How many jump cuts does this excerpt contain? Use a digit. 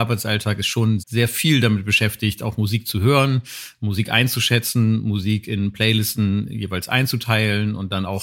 1